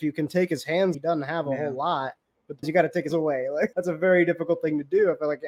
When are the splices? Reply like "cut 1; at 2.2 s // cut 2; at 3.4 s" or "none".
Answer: cut 1; at 0.9 s // cut 2; at 2.6 s // cut 3; at 3.1 s // cut 4; at 3.7 s